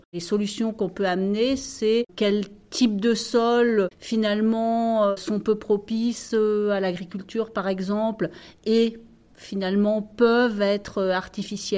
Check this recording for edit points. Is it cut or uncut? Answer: uncut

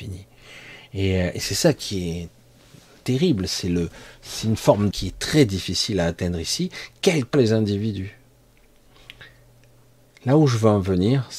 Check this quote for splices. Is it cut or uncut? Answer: cut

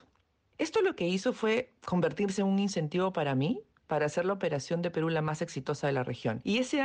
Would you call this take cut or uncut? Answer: cut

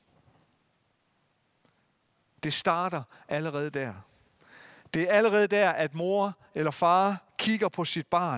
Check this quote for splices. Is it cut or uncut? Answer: cut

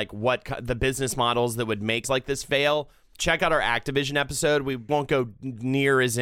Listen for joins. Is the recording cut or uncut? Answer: cut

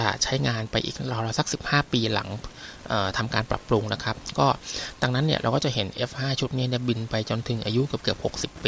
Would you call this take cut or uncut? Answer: uncut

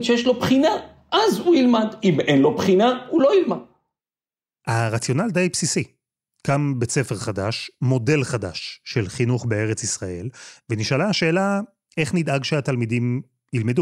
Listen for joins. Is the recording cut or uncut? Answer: uncut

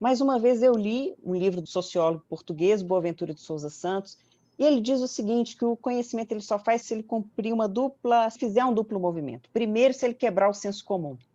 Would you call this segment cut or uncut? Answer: cut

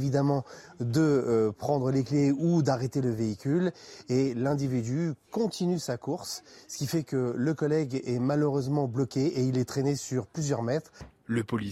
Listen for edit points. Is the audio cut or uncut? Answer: uncut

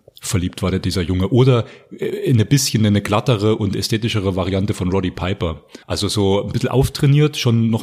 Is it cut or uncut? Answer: cut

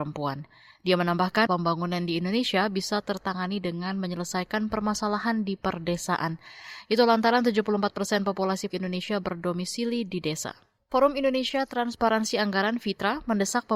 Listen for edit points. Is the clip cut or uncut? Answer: cut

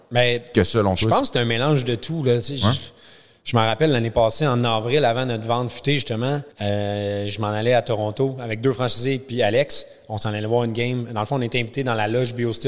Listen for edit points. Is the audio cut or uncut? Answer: cut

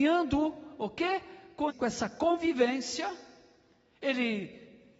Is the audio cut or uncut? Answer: cut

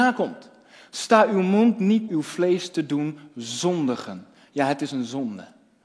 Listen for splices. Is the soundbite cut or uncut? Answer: cut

